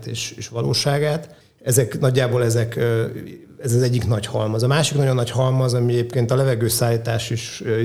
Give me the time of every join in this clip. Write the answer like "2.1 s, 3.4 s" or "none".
1.4 s